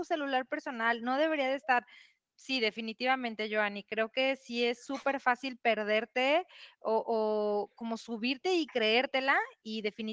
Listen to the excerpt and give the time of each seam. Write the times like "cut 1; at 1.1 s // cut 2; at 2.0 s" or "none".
none